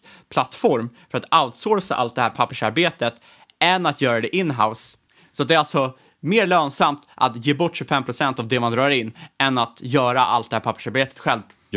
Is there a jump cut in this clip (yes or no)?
no